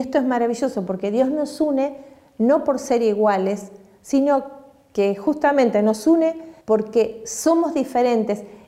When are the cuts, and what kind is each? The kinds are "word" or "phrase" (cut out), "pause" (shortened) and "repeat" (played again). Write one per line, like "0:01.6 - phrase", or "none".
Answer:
0:06.6 - pause